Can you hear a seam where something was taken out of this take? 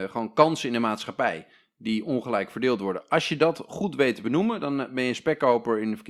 no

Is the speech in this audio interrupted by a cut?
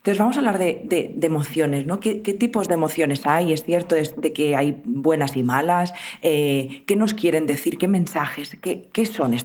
no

